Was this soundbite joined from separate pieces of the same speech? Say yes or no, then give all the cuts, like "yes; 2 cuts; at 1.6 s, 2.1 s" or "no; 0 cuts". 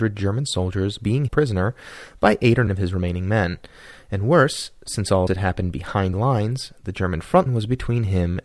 yes; 5 cuts; at 1.3 s, 2.7 s, 5.3 s, 6.1 s, 7.5 s